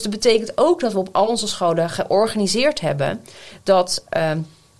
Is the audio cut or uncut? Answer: uncut